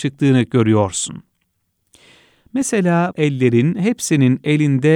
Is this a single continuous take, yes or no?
no